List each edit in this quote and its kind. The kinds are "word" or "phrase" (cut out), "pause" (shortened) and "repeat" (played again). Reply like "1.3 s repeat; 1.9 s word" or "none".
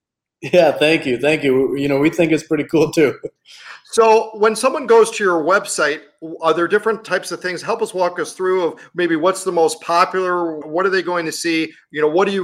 3.4 s pause; 10.6 s word